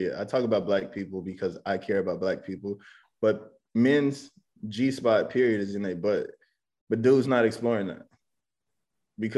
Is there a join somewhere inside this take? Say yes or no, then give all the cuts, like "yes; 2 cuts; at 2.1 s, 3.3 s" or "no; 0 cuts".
no; 0 cuts